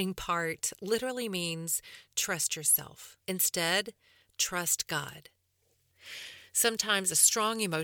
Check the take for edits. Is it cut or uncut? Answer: cut